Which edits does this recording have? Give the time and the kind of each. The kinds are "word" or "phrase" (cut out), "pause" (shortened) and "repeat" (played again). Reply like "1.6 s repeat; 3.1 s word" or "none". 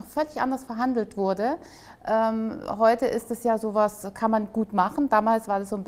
none